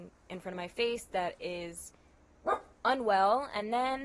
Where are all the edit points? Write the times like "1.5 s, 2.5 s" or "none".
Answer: 2.7 s